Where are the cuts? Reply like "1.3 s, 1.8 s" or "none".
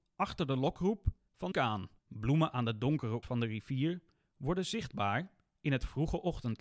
1.5 s, 2.0 s, 3.2 s